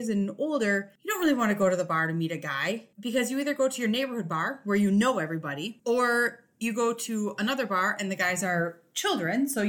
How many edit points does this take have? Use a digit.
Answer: 0